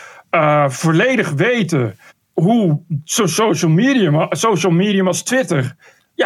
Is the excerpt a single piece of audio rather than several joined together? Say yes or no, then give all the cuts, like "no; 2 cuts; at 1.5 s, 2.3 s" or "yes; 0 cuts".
no; 1 cut; at 2.1 s